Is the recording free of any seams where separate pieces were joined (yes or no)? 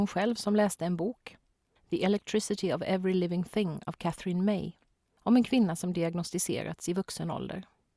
yes